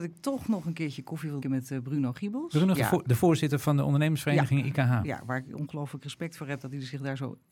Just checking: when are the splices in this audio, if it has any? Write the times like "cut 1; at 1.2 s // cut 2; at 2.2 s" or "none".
cut 1; at 1.4 s // cut 2; at 2.7 s